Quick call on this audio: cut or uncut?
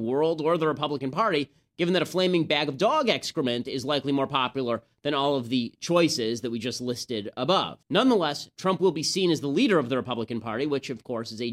cut